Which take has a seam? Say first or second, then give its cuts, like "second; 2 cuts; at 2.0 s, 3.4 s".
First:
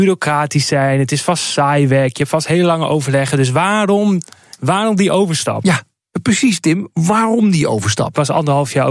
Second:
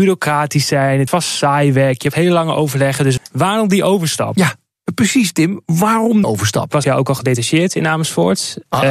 second; 5 cuts; at 1.1 s, 2.1 s, 3.2 s, 6.2 s, 6.8 s